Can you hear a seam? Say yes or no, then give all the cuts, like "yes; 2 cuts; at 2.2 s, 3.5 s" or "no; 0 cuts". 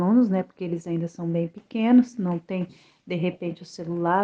no; 0 cuts